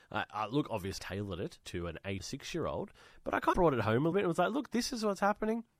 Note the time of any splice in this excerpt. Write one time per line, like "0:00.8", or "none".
0:01.0
0:01.6
0:02.2
0:03.5
0:04.1